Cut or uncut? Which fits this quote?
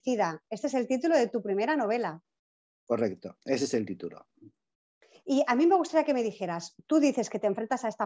uncut